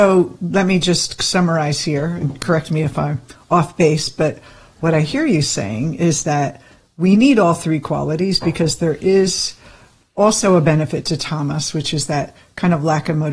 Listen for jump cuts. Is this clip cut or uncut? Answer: uncut